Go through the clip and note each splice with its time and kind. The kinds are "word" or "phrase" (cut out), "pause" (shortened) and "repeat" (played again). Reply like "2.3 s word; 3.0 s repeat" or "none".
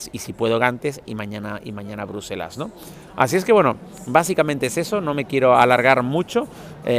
none